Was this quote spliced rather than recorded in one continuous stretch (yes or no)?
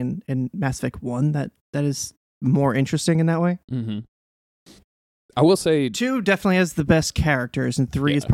no